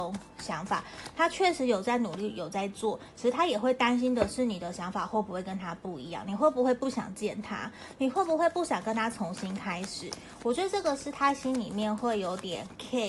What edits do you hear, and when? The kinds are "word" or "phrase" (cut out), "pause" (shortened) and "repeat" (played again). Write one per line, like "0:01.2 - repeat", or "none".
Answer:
none